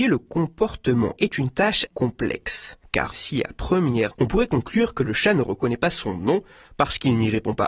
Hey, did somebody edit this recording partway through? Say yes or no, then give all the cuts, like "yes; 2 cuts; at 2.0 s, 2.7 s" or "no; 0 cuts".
yes; 4 cuts; at 1.2 s, 1.9 s, 3.1 s, 4.1 s